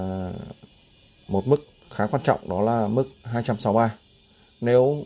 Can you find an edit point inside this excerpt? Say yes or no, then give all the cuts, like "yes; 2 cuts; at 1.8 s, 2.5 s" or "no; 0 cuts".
no; 0 cuts